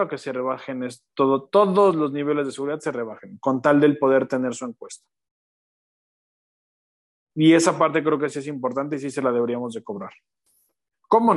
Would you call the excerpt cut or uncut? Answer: uncut